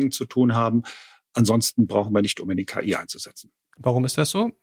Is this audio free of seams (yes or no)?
yes